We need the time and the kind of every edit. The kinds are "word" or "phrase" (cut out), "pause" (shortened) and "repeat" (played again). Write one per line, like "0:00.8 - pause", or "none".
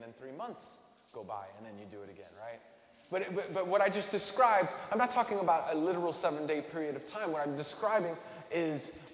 none